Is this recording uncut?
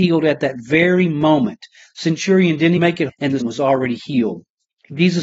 no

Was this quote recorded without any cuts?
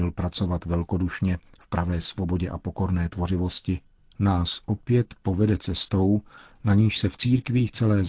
yes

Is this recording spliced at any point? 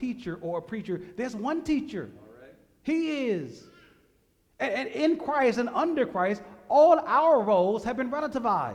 no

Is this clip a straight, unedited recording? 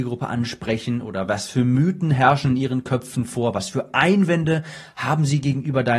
yes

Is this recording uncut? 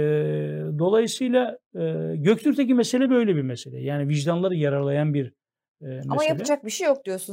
yes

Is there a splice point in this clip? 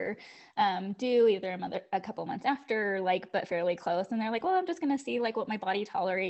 no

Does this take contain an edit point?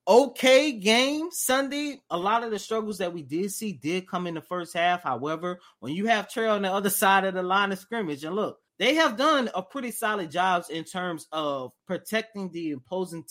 yes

